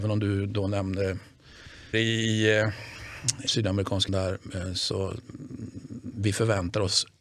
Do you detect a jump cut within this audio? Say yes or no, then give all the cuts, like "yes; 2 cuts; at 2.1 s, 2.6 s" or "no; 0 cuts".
yes; 4 cuts; at 1.9 s, 3.5 s, 4.1 s, 6.1 s